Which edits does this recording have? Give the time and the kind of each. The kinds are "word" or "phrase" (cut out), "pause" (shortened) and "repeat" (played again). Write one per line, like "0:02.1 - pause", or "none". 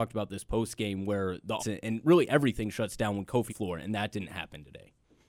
0:01.6 - word
0:03.5 - phrase